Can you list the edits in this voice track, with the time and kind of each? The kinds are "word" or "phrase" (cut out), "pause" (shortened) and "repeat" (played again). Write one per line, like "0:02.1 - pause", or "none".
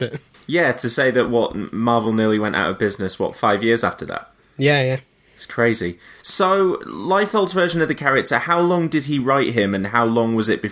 none